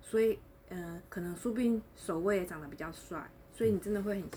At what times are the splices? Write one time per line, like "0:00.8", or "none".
0:01.1